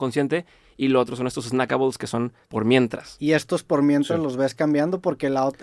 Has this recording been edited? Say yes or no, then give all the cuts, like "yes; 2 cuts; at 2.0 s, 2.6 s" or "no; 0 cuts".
yes; 1 cut; at 2.4 s